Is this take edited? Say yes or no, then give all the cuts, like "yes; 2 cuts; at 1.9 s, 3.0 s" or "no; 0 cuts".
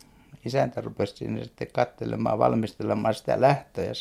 no; 0 cuts